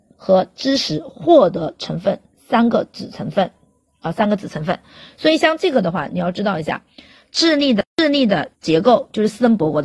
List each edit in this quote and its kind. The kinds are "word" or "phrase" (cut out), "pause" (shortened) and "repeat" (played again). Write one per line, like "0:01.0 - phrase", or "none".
0:07.9 - pause
0:08.5 - pause